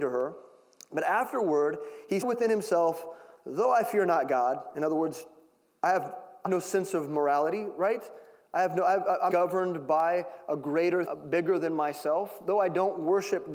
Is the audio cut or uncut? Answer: cut